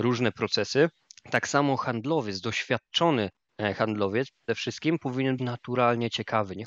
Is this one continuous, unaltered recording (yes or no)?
no